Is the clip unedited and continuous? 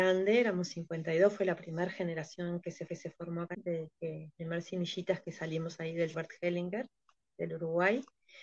no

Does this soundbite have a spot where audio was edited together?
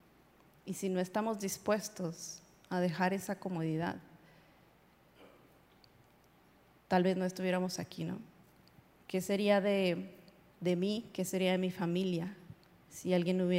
no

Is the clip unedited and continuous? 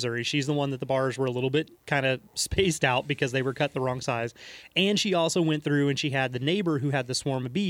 no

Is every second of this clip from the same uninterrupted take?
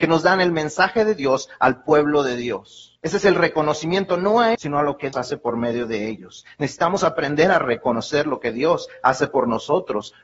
no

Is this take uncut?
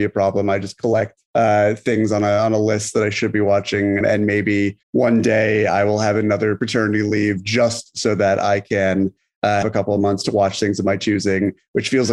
no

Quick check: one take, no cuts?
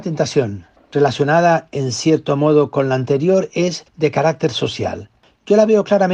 no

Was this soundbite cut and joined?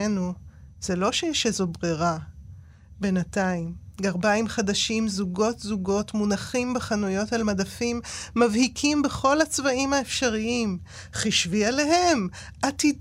no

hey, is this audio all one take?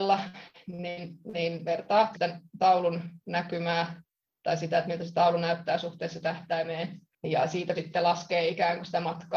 no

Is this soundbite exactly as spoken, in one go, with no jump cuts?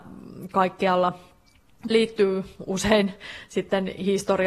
no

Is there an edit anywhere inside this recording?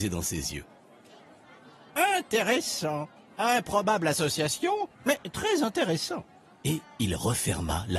yes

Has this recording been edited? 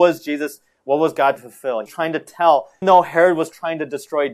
yes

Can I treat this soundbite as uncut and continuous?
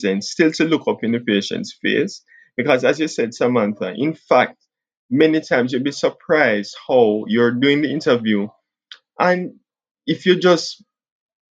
yes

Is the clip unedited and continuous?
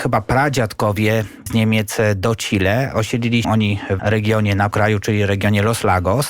no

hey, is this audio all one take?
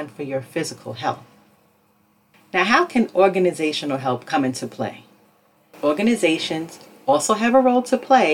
yes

